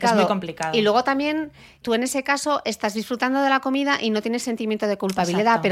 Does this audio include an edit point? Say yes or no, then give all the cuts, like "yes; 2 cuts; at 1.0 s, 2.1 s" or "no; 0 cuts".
yes; 1 cut; at 1.8 s